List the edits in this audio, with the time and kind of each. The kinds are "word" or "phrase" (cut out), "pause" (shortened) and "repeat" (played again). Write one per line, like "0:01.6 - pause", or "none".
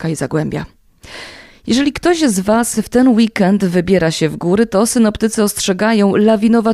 none